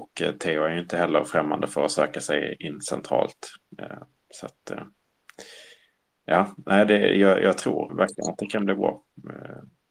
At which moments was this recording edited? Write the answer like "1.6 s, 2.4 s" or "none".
7.9 s